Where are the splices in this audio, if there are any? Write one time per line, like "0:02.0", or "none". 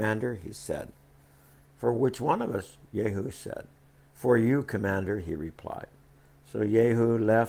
none